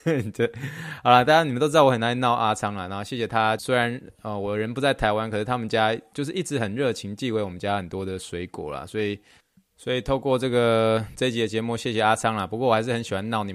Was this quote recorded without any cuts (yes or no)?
no